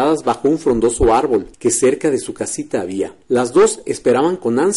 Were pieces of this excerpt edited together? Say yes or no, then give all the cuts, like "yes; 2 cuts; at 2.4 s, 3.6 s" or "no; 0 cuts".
yes; 2 cuts; at 1.5 s, 3.2 s